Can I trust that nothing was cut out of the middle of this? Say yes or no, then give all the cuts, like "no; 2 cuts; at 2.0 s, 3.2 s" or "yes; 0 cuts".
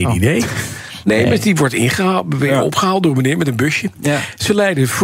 yes; 0 cuts